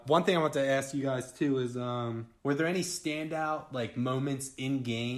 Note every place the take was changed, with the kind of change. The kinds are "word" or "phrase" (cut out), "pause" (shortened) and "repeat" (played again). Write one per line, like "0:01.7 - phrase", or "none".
0:02.4 - pause